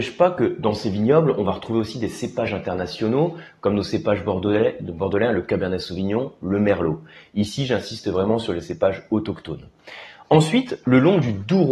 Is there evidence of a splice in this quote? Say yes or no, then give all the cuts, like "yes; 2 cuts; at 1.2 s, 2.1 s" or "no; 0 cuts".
no; 0 cuts